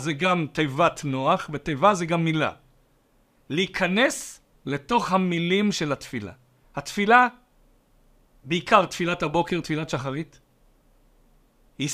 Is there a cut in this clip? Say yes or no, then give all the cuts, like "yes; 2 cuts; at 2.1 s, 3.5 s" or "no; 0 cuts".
no; 0 cuts